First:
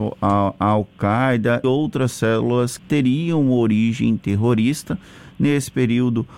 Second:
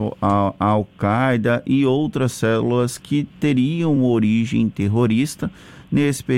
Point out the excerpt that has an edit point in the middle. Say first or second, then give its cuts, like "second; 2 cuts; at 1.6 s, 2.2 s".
first; 2 cuts; at 1.6 s, 2.8 s